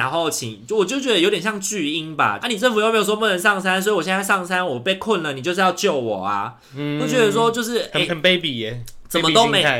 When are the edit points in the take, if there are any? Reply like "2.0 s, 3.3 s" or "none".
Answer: 2.4 s, 8.1 s